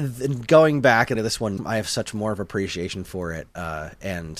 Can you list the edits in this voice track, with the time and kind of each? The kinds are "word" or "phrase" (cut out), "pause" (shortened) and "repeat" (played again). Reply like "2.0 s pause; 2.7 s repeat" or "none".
1.2 s phrase; 1.6 s word